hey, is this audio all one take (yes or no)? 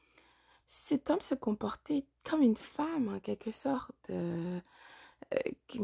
yes